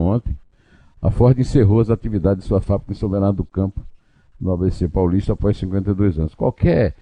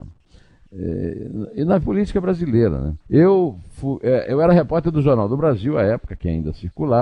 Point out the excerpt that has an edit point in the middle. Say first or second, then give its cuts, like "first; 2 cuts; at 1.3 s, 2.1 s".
second; 2 cuts; at 1.8 s, 3.0 s